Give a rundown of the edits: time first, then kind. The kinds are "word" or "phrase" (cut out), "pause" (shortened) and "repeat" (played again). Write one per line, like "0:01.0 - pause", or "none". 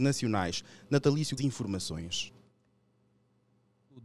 0:01.4 - phrase